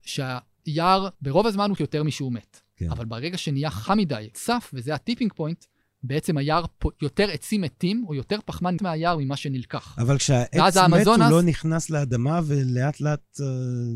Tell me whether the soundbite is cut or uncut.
cut